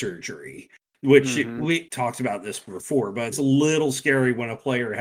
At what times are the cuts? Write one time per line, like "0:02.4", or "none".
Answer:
0:01.9
0:03.3